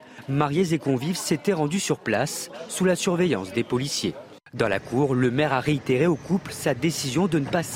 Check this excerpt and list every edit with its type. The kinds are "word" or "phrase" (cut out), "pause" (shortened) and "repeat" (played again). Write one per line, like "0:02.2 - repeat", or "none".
none